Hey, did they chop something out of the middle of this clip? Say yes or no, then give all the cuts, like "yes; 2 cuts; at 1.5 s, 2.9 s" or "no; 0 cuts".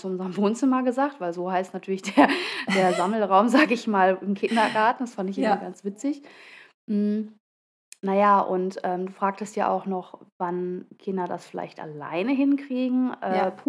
no; 0 cuts